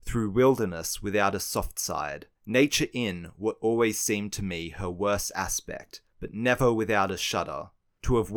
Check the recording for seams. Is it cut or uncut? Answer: cut